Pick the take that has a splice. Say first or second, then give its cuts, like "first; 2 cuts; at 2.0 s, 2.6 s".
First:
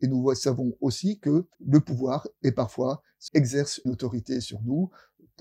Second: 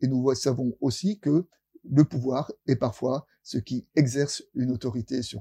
first; 3 cuts; at 1.5 s, 3.3 s, 3.9 s